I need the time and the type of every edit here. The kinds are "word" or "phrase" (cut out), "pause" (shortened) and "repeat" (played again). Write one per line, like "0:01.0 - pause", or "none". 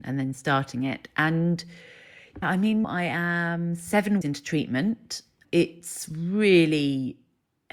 0:02.4 - word
0:02.8 - word
0:04.2 - word
0:05.4 - word